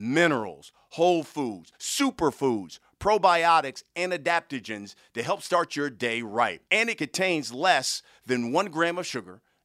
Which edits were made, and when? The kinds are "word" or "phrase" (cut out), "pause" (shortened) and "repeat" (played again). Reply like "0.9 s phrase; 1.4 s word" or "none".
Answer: 6.7 s pause

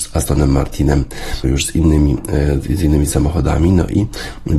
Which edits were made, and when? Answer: 1.4 s word

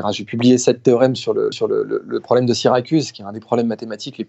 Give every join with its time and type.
1.5 s repeat

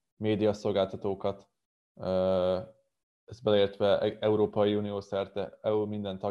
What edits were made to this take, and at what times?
none

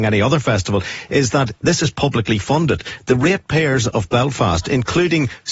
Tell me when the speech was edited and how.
none

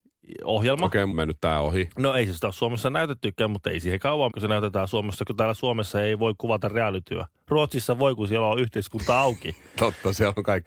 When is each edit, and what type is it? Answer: 1.1 s word; 4.3 s word; 5.3 s word

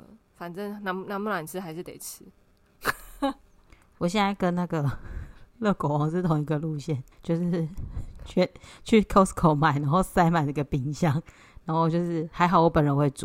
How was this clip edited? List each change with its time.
7.1 s pause

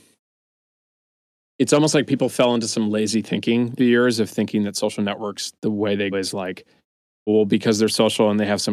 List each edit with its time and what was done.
3.8 s phrase; 6.1 s word; 7.3 s word

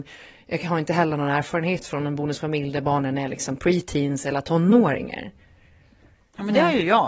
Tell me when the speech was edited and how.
none

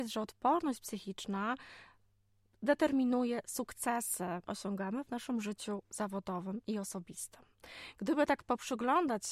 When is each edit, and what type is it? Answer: 4.5 s word

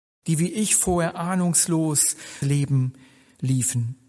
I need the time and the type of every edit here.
2.4 s word

